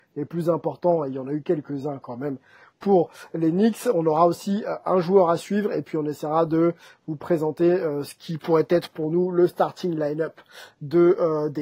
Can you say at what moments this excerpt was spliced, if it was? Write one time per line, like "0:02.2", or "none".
none